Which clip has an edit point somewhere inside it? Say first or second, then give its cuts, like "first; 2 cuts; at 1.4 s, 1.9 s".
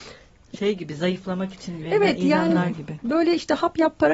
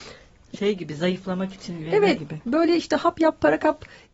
second; 1 cut; at 2.2 s